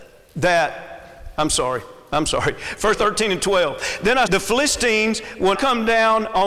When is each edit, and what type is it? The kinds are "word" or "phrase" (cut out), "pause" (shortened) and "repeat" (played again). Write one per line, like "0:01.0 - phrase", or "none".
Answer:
0:02.9 - word
0:04.3 - word
0:05.5 - word

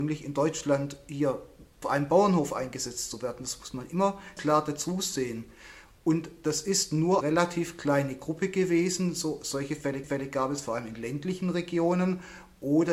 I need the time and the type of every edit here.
0:01.8 - word
0:04.4 - word
0:07.2 - word
0:10.0 - repeat

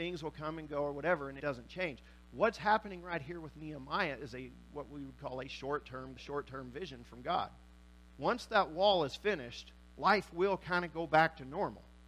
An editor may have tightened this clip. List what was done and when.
0:01.4 - phrase
0:06.2 - word

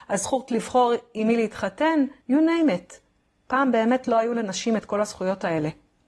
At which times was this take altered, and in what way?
0:02.2 - pause

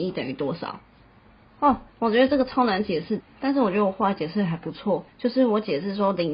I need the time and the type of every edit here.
0:01.9 - pause
0:03.2 - word
0:05.1 - pause

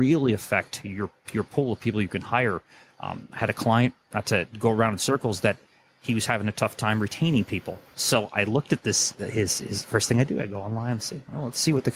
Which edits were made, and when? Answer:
none

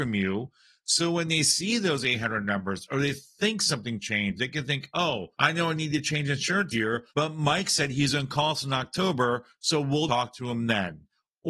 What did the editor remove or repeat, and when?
0:05.3 - pause
0:06.7 - word
0:07.1 - pause
0:10.1 - word

